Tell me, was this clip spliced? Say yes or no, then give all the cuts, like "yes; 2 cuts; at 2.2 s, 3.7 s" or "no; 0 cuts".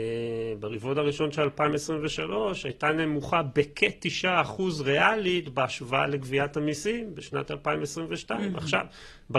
no; 0 cuts